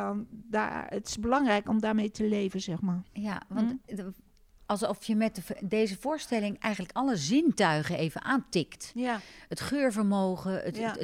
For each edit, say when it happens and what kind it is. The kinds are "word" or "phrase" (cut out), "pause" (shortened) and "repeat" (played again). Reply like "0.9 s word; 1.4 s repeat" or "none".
none